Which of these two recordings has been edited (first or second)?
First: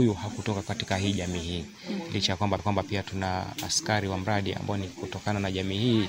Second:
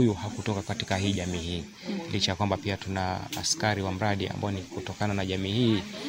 first